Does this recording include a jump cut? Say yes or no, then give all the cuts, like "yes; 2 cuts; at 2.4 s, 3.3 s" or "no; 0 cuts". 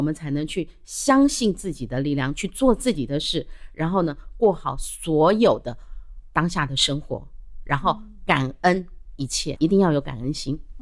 yes; 1 cut; at 9.6 s